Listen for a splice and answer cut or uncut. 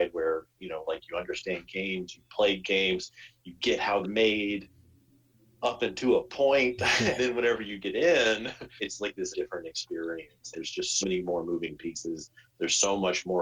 cut